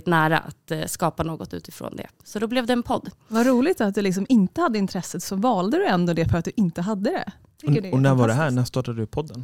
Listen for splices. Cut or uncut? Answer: uncut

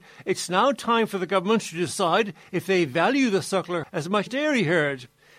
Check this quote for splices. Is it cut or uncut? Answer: cut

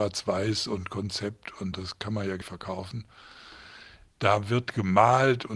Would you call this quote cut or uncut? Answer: cut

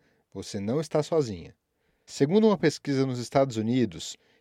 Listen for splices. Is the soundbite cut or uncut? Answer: uncut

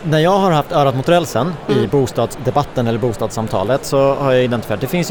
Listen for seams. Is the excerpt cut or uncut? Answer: uncut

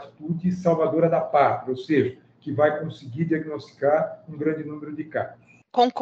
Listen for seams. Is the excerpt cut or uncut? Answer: uncut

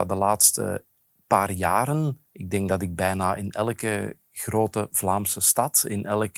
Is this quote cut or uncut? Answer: cut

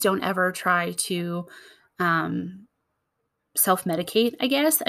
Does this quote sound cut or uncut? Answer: uncut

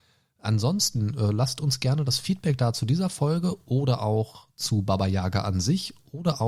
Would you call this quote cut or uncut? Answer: uncut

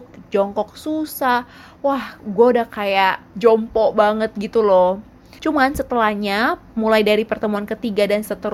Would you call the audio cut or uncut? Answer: uncut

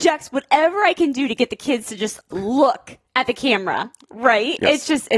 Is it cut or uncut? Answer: cut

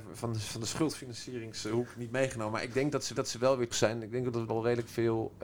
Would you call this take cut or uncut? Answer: cut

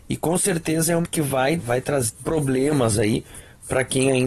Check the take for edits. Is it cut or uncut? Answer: cut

